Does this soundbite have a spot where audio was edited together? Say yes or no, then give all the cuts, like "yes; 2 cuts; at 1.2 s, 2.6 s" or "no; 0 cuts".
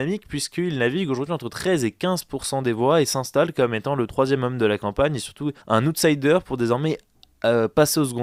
yes; 1 cut; at 5.6 s